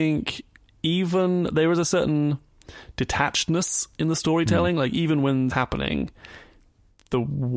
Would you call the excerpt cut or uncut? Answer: cut